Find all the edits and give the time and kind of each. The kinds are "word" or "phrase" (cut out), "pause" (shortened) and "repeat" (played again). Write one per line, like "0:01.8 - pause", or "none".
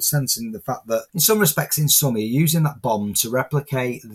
0:01.1 - pause